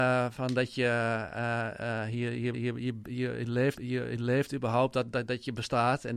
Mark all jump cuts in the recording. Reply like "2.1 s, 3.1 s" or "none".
2.5 s, 3.8 s